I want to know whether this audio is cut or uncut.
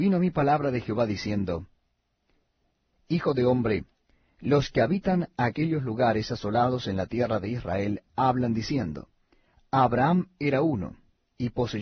uncut